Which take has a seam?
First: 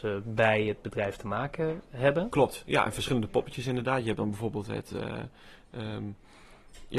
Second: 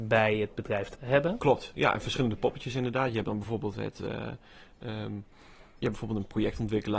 second; 2 cuts; at 0.9 s, 5.8 s

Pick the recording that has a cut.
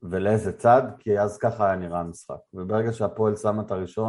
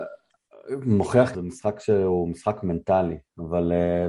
second; 1 cut; at 1.3 s

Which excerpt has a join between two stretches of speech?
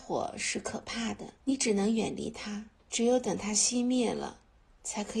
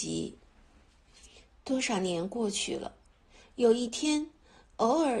first; 2 cuts; at 1.4 s, 2.8 s

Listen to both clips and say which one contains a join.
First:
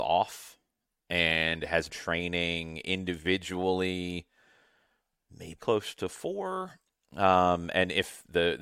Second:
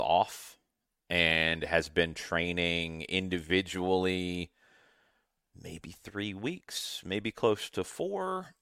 first; 2 cuts; at 1.9 s, 5.6 s

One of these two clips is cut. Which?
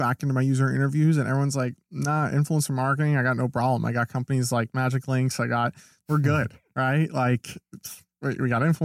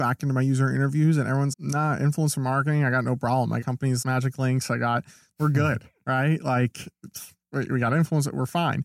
second; 3 cuts; at 1.5 s, 3.6 s, 4.0 s

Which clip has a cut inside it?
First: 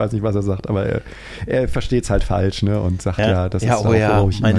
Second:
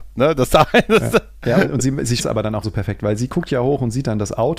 second; 3 cuts; at 1.8 s, 2.2 s, 2.6 s

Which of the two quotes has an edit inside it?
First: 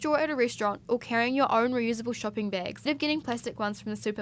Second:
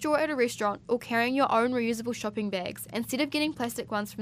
first; 1 cut; at 2.9 s

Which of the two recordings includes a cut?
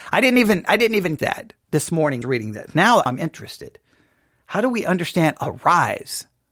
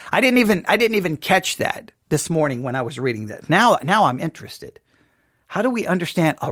first; 3 cuts; at 1.2 s, 2.2 s, 3.1 s

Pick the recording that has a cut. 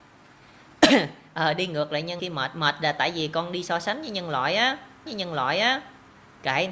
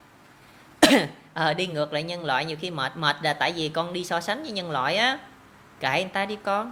first; 2 cuts; at 2.2 s, 5.1 s

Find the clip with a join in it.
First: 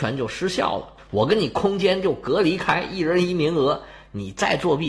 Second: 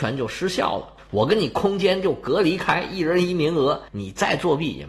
second; 1 cut; at 3.9 s

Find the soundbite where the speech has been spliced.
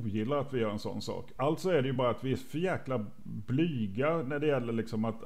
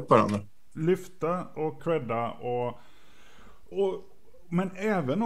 second; 2 cuts; at 1.8 s, 3.7 s

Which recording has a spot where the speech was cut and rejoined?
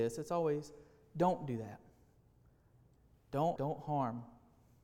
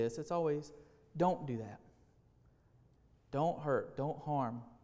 first; 1 cut; at 3.6 s

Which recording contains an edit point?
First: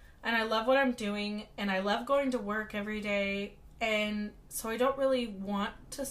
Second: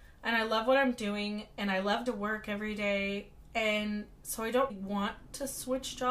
second; 2 cuts; at 2.1 s, 4.7 s

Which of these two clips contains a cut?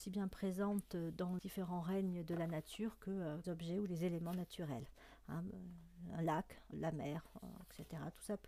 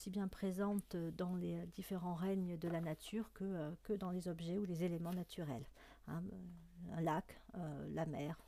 first; 3 cuts; at 1.4 s, 3.4 s, 6.7 s

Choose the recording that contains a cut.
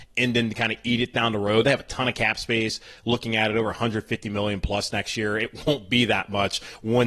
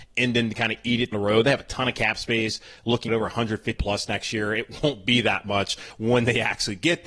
second; 3 cuts; at 1.1 s, 3.1 s, 3.8 s

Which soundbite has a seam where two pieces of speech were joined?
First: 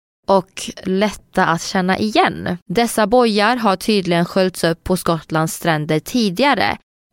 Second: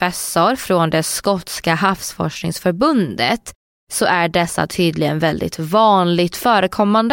first; 1 cut; at 2.6 s

